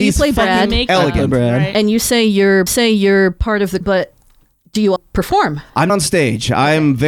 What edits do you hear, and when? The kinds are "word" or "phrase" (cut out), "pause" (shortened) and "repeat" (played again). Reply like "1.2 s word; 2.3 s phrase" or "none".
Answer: 2.7 s repeat; 3.8 s word; 5.0 s word; 5.9 s word